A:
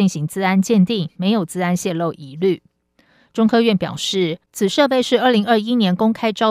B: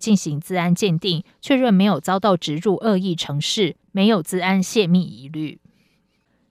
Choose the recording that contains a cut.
A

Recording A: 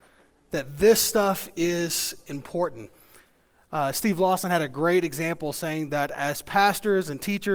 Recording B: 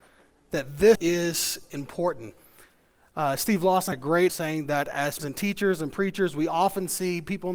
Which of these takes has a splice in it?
B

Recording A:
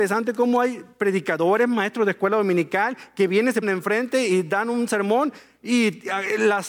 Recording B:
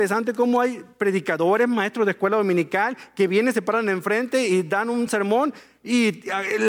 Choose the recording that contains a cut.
A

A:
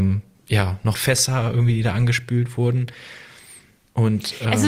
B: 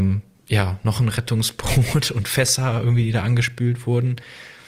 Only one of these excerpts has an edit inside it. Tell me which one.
A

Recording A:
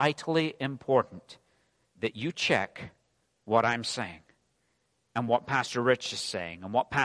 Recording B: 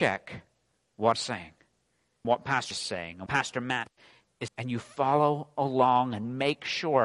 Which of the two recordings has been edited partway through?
B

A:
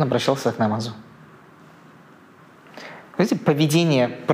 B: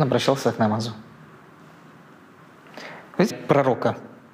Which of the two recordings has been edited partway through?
B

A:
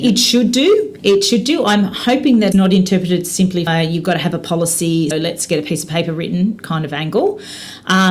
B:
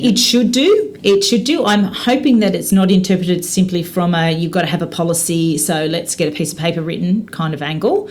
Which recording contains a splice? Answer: A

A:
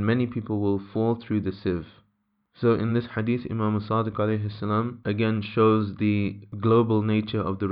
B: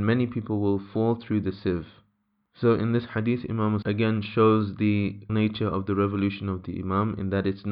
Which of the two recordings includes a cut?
B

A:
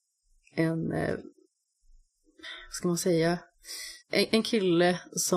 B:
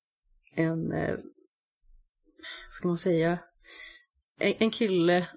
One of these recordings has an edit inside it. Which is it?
A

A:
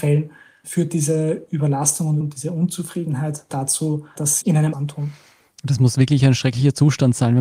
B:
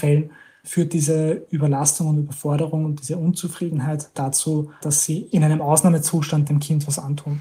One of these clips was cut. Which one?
A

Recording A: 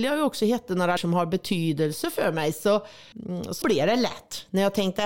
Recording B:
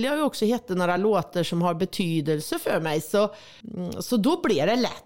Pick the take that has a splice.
A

